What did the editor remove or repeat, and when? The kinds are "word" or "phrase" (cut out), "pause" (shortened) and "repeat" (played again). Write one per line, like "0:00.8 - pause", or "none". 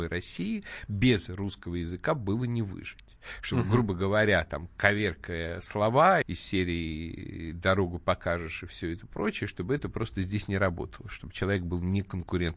0:06.2 - phrase